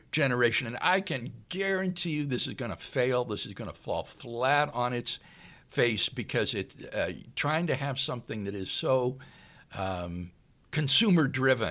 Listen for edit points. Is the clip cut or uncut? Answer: uncut